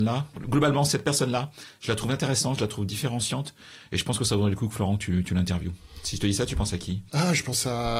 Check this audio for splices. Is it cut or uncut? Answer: cut